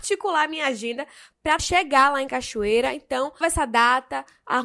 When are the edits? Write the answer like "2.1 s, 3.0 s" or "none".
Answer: 1.6 s, 3.4 s